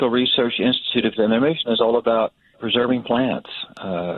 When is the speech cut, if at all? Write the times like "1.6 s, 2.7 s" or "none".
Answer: 1.1 s, 2.5 s